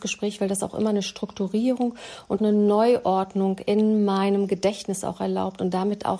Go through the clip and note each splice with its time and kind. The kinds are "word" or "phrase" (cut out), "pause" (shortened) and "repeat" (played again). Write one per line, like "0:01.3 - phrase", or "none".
0:02.4 - word